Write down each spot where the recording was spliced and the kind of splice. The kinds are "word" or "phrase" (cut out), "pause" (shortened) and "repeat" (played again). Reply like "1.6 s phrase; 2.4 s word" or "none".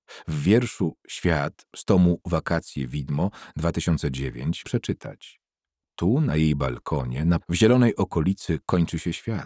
4.6 s word; 7.4 s word